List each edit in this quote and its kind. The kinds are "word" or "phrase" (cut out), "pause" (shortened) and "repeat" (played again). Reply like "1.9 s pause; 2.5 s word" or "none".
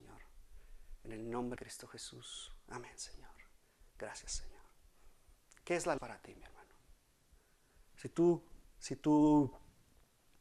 1.6 s word; 3.9 s pause; 6.0 s word